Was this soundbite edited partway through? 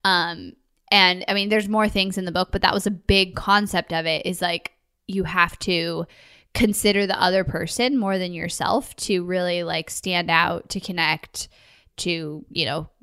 no; 0 cuts

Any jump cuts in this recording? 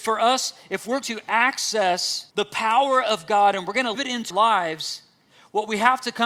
yes; 4 cuts; at 1.0 s, 2.3 s, 3.9 s, 4.3 s

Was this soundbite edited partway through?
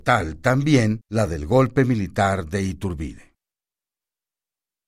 yes; 1 cut; at 1.0 s

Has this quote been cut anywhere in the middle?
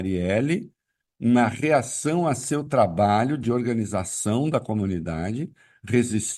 no; 0 cuts

